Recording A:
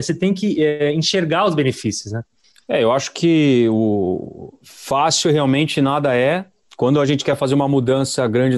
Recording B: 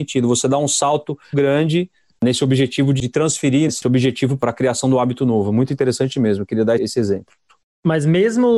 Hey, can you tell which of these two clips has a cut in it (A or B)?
B